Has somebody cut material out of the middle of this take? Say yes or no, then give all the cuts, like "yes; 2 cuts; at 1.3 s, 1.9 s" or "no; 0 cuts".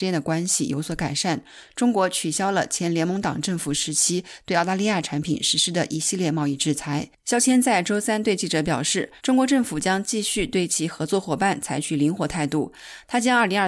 yes; 1 cut; at 9.2 s